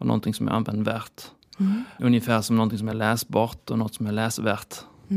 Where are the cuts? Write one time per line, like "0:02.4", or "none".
none